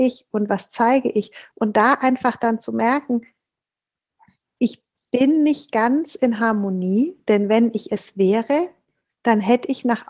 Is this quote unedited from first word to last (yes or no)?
yes